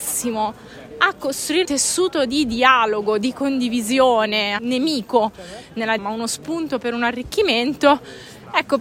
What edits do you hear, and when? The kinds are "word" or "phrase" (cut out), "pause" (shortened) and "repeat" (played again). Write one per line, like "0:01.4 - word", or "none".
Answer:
0:01.6 - word
0:04.6 - phrase
0:06.0 - word